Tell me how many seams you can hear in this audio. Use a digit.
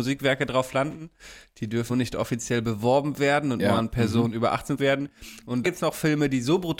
3